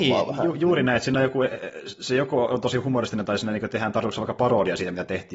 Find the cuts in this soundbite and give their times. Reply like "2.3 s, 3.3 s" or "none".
none